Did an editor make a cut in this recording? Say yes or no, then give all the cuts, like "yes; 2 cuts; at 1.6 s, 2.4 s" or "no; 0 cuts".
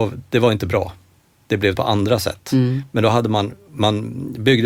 yes; 1 cut; at 1.8 s